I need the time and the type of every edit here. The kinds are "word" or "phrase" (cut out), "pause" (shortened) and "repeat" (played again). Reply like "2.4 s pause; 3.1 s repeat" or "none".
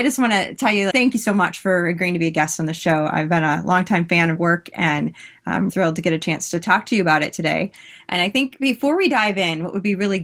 0.9 s word; 4.4 s word; 5.7 s word